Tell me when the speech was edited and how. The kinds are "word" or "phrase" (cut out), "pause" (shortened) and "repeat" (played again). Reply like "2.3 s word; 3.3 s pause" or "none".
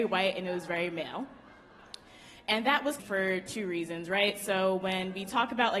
3.0 s word